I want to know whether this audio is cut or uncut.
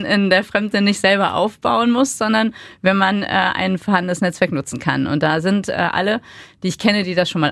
uncut